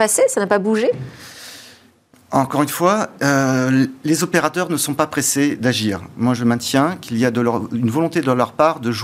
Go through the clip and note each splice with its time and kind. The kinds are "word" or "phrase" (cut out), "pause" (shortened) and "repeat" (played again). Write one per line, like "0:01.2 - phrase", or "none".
none